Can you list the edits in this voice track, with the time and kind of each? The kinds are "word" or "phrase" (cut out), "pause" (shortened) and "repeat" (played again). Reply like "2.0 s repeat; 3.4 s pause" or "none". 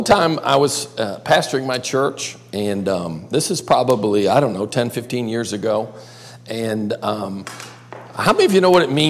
none